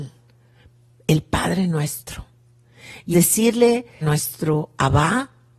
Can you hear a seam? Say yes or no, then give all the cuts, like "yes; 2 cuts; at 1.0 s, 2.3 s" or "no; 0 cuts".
yes; 2 cuts; at 3.1 s, 4.0 s